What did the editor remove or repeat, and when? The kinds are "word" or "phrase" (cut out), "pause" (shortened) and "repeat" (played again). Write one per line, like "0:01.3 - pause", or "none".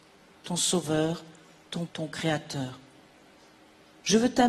0:01.9 - word